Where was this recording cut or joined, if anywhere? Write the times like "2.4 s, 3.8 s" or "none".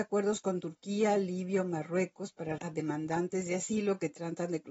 2.6 s

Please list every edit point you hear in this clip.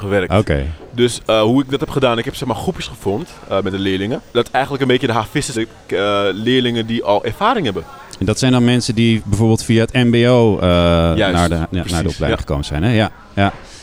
4.3 s, 5.5 s

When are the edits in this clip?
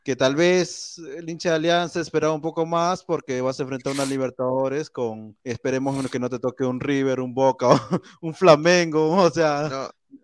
5.4 s

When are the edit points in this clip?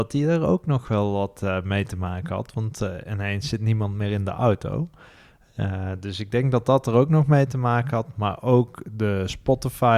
none

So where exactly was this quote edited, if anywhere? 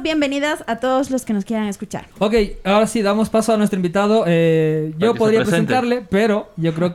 2.1 s

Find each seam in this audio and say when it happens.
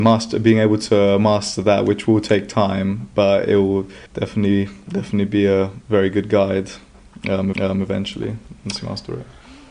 4.1 s, 7.5 s

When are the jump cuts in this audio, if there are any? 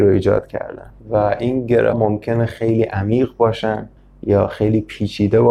1.0 s, 1.9 s, 4.0 s

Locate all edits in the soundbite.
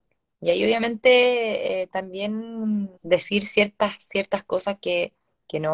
3.0 s

